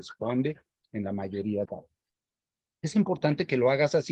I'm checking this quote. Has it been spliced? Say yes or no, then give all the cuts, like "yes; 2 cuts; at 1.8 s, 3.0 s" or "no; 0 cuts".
yes; 1 cut; at 1.7 s